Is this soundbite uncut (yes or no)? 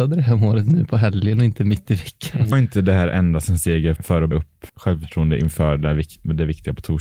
no